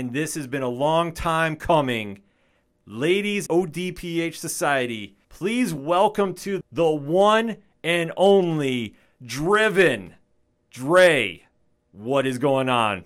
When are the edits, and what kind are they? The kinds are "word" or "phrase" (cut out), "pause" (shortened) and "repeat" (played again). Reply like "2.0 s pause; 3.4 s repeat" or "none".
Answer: 3.5 s phrase; 5.2 s pause; 6.6 s phrase; 9.2 s word